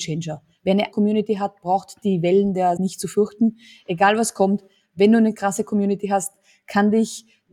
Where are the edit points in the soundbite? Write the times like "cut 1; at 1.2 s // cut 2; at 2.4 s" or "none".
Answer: cut 1; at 0.9 s // cut 2; at 2.8 s